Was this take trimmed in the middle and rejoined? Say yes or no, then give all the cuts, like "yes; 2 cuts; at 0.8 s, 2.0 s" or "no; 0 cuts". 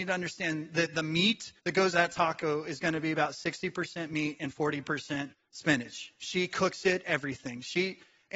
yes; 4 cuts; at 1.6 s, 1.9 s, 5.3 s, 7.0 s